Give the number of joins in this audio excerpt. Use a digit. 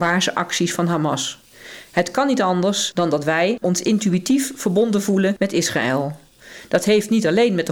1